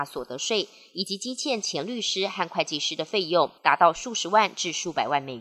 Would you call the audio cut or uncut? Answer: cut